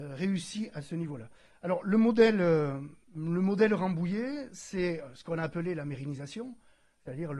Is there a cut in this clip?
yes; 1 cut; at 3.0 s

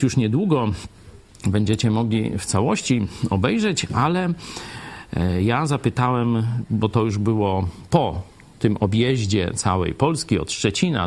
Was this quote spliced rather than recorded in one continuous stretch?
no; 0 cuts

